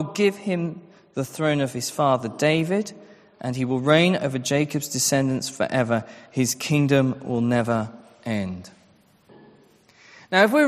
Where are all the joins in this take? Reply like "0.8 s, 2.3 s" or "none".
none